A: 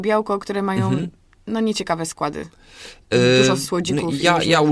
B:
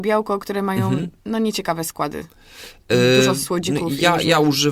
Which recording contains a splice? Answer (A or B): B